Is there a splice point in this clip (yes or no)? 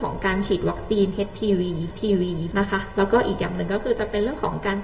yes